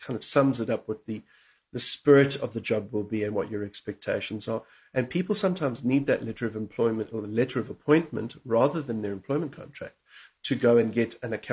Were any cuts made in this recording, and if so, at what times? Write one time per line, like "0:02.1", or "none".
none